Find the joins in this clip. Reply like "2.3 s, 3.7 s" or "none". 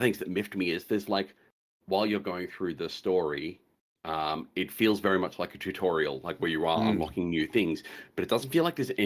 none